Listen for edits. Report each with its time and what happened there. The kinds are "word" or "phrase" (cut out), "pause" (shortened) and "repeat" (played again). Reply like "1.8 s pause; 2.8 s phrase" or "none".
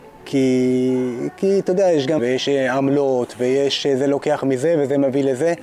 2.2 s word